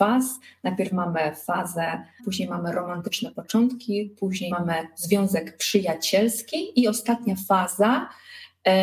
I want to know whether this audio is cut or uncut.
cut